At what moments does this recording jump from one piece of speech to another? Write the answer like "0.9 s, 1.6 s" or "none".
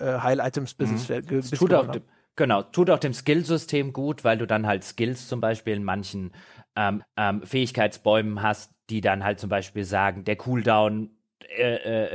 7.0 s